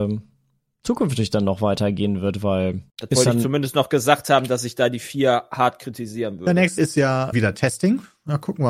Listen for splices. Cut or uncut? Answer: cut